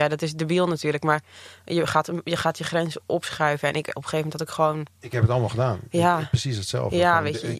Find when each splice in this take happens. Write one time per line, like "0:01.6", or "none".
none